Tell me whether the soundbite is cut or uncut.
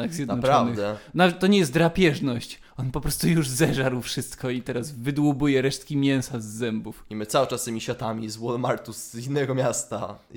uncut